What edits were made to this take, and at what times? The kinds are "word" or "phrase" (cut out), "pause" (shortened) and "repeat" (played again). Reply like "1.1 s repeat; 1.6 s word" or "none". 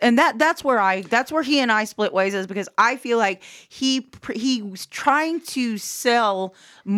none